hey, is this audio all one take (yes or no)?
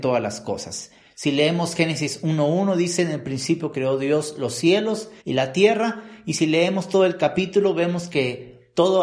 no